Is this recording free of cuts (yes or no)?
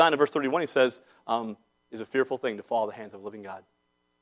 yes